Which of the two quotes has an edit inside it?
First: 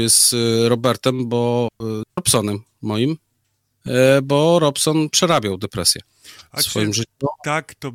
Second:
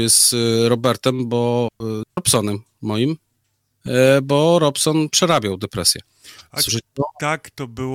second; 1 cut; at 6.7 s

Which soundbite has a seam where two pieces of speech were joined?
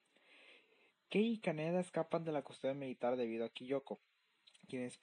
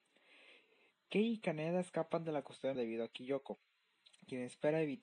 second; 1 cut; at 2.8 s

